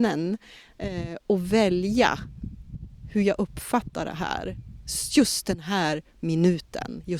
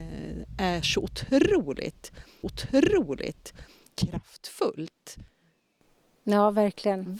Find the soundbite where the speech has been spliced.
second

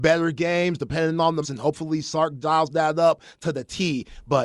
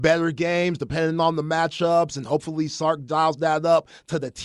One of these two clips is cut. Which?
first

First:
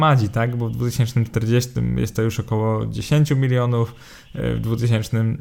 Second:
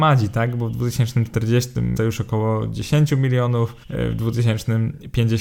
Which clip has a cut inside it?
second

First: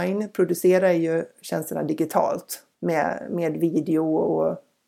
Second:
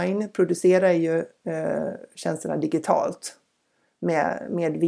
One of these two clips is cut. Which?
first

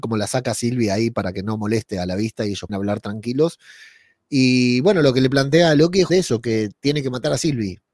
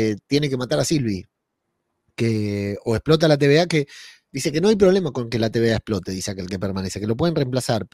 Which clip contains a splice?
first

